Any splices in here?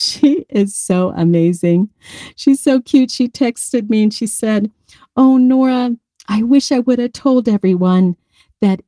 no; 0 cuts

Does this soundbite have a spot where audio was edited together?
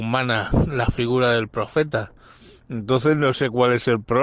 no; 0 cuts

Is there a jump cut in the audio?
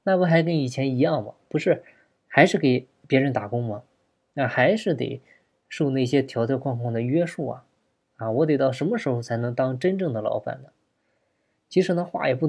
no; 0 cuts

